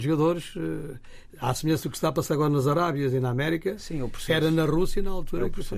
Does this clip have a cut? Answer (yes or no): no